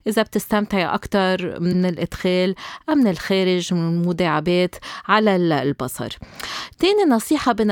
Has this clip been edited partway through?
yes; 1 cut; at 1.7 s

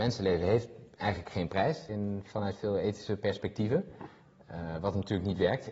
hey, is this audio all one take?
no; 1 cut; at 1.9 s

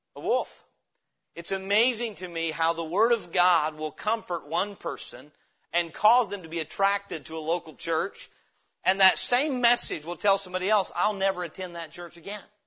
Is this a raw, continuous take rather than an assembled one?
yes; 0 cuts

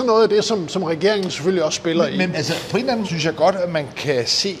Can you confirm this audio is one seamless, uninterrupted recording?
no; 2 cuts; at 2.3 s, 3.0 s

